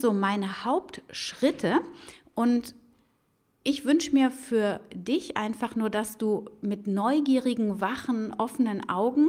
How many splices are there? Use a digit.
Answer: 0